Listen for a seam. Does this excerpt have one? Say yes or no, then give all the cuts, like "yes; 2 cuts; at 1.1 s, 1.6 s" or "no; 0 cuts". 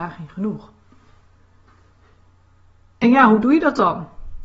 no; 0 cuts